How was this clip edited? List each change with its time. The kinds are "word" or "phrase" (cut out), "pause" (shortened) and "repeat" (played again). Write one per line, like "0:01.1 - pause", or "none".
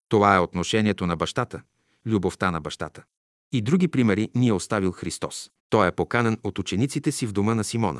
0:05.6 - pause

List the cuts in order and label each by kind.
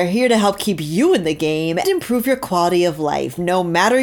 0:01.8 - word

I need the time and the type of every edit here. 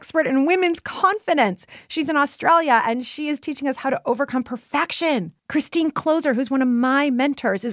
0:05.4 - pause

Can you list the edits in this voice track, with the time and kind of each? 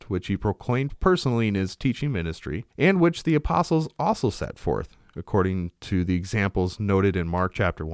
0:02.7 - pause

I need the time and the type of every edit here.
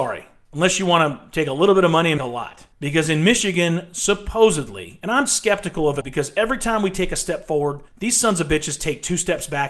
0:02.2 - word
0:02.7 - pause
0:06.0 - word
0:07.9 - pause

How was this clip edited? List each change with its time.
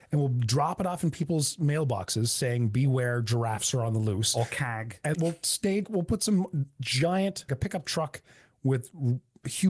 0:05.1 - word
0:05.8 - word
0:07.5 - word

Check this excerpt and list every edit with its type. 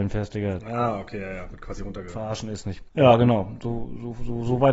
0:02.9 - pause

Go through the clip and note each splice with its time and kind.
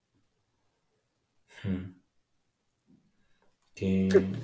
none

